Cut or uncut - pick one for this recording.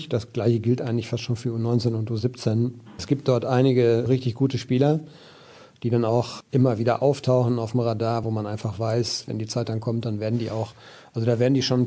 uncut